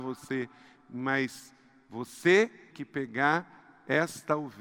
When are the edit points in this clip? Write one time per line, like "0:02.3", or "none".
0:02.7

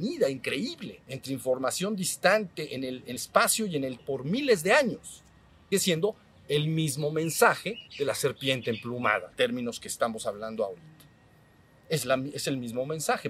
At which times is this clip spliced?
0:01.0
0:03.2
0:04.0
0:05.7
0:07.9
0:09.3

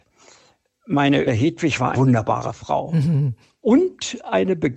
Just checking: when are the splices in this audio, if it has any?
0:01.3
0:01.9
0:03.5

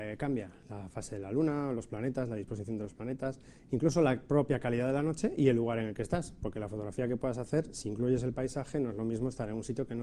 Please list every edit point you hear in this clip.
none

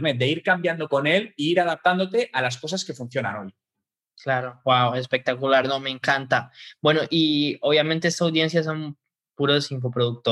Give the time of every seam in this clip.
none

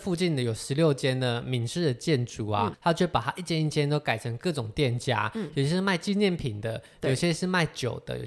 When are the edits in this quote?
0:02.7

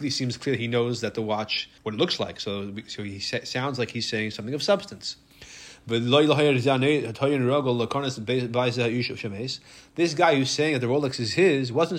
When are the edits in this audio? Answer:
0:01.8

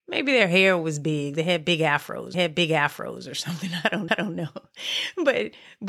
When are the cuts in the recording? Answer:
0:02.3
0:04.1

